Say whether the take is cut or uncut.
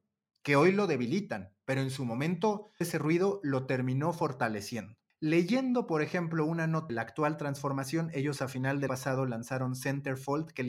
cut